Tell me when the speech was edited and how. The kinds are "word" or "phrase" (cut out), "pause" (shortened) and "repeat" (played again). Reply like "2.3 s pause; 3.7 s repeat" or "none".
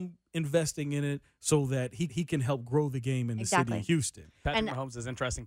2.1 s repeat

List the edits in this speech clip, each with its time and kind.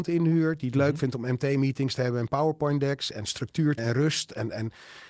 3.8 s word

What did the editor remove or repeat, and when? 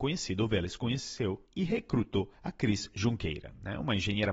1.5 s pause; 2.3 s pause

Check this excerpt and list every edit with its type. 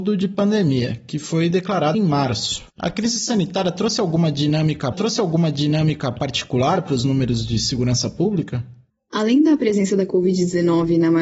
1.9 s word; 2.7 s pause; 4.9 s repeat; 8.9 s pause

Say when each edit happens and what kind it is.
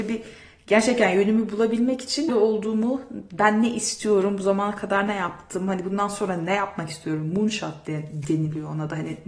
2.3 s word

